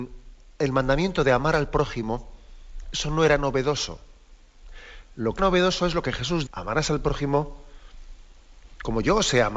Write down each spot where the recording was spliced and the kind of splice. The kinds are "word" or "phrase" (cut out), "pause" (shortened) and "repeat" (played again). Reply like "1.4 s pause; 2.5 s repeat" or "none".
5.4 s word; 6.5 s word

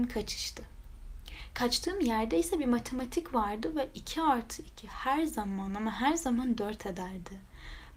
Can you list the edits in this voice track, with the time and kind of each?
none

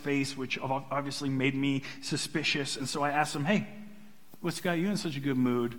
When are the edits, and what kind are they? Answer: none

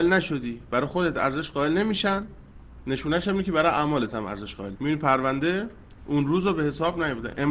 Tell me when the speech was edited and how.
4.7 s word

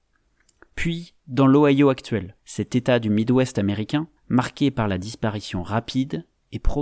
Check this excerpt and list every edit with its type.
2.4 s pause; 4.2 s pause

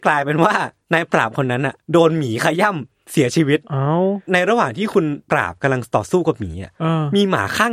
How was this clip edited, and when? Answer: 1.8 s pause

